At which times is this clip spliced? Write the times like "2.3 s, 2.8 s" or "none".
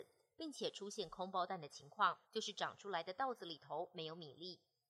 2.2 s